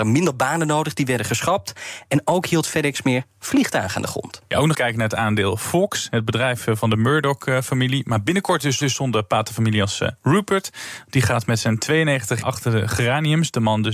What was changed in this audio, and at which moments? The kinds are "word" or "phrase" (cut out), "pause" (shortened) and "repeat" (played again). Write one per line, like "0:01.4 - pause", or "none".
0:04.7 - word
0:08.8 - repeat
0:12.4 - word